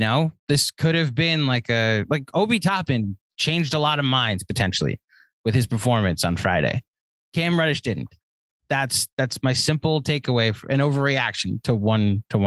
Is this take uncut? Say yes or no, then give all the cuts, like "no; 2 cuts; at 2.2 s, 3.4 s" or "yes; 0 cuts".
yes; 0 cuts